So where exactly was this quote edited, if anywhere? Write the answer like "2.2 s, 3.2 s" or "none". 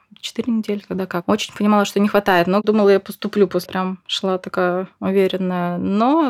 3.7 s